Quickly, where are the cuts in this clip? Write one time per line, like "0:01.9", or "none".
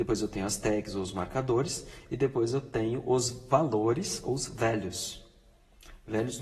none